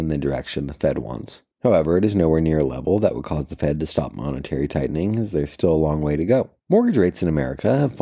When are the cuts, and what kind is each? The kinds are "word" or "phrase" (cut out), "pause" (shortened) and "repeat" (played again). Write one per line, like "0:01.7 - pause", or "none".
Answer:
0:01.5 - pause
0:06.6 - pause